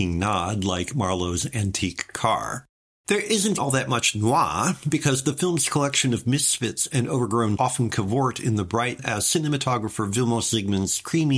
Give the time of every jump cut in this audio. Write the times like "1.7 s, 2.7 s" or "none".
2.8 s, 3.6 s, 7.6 s, 9.0 s